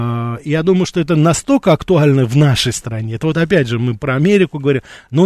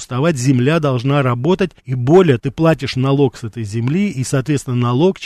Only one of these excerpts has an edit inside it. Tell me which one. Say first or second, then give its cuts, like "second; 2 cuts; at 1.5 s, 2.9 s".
second; 2 cuts; at 1.8 s, 2.4 s